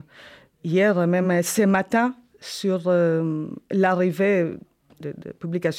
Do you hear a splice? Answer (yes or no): no